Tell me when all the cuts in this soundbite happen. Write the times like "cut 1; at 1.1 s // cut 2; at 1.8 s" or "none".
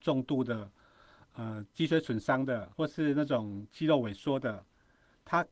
cut 1; at 2.7 s